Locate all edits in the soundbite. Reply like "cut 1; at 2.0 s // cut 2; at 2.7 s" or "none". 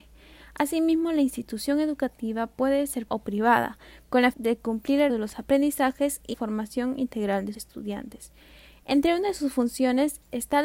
cut 1; at 3.1 s // cut 2; at 4.3 s // cut 3; at 5.1 s // cut 4; at 6.3 s // cut 5; at 7.5 s